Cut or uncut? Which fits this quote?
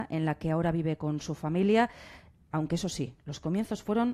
uncut